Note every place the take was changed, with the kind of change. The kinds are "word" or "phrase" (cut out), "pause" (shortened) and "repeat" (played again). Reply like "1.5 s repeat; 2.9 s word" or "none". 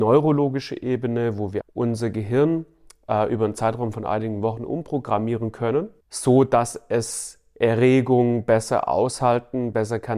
1.6 s word; 6.0 s pause